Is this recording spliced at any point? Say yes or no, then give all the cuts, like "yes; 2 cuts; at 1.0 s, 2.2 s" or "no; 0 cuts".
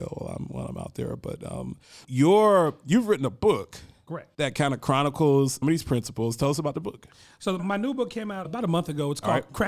yes; 5 cuts; at 2.0 s, 4.3 s, 5.6 s, 7.6 s, 8.4 s